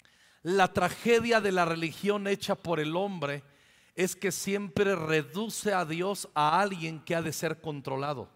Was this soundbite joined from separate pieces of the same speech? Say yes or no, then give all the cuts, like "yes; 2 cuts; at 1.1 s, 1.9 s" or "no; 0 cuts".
no; 0 cuts